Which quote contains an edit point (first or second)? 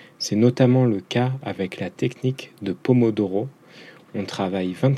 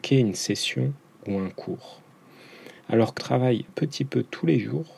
second